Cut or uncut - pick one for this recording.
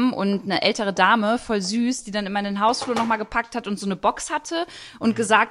uncut